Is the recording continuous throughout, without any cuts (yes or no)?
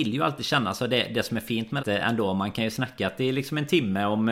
no